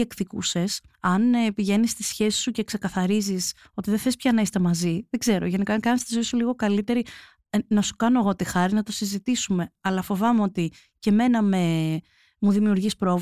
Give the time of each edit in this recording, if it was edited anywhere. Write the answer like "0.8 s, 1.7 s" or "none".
none